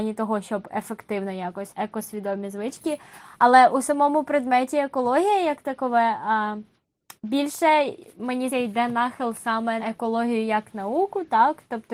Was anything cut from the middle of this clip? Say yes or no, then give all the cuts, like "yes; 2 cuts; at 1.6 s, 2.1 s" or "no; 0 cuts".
yes; 4 cuts; at 1.7 s, 7.2 s, 8.5 s, 9.8 s